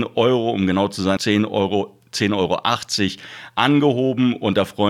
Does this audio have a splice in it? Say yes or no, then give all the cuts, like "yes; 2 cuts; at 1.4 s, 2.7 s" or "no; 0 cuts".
yes; 1 cut; at 1.2 s